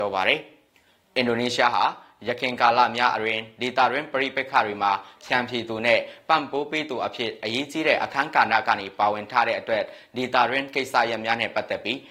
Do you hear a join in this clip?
no; 0 cuts

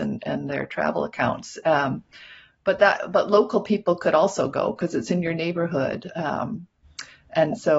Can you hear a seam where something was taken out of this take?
no; 0 cuts

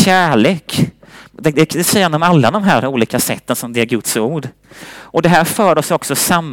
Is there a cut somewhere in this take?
no; 0 cuts

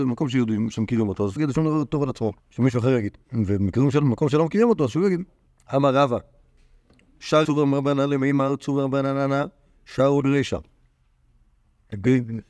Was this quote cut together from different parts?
yes; 6 cuts; at 1.4 s, 2.4 s, 3.2 s, 5.4 s, 7.4 s, 10.2 s

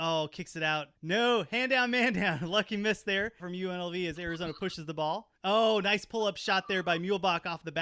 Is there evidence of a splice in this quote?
yes; 3 cuts; at 1.0 s, 3.4 s, 5.4 s

